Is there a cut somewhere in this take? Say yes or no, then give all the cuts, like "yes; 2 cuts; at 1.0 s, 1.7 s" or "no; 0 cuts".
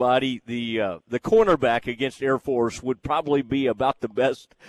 no; 0 cuts